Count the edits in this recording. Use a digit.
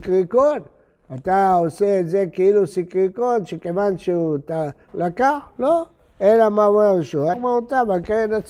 2